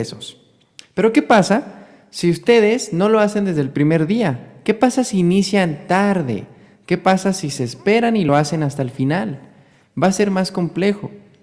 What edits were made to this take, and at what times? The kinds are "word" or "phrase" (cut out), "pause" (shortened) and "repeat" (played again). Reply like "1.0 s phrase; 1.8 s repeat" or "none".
none

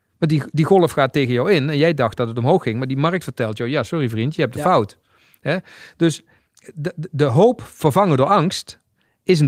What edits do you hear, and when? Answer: none

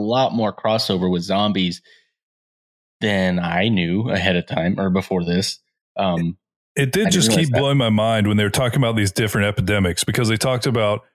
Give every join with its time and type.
none

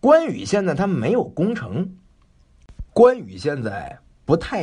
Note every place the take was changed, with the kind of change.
2.9 s pause

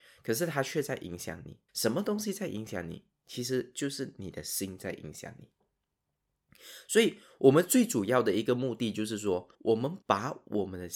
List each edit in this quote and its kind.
1.7 s pause; 9.5 s pause; 10.0 s pause

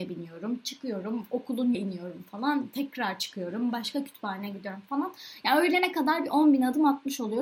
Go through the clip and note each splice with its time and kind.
1.7 s word

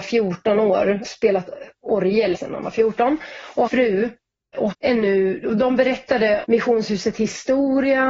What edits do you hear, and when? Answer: 1.0 s word; 2.3 s word; 3.7 s word; 4.7 s word; 6.4 s word

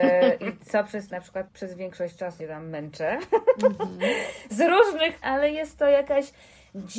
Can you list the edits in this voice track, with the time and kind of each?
1.1 s word; 1.5 s phrase; 2.4 s word; 5.2 s word

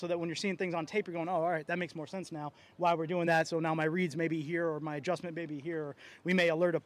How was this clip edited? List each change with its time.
none

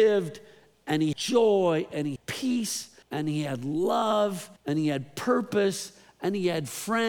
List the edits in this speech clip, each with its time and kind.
1.1 s word; 2.2 s word; 3.0 s pause; 4.6 s pause

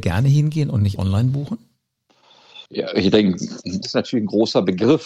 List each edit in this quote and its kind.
1.0 s word; 2.7 s pause; 3.8 s word

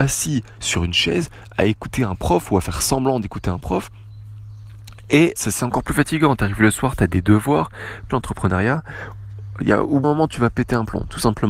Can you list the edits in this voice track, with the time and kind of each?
5.4 s word; 8.1 s word; 10.0 s word

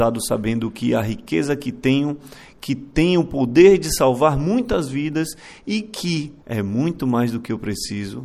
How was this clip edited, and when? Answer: 6.4 s pause

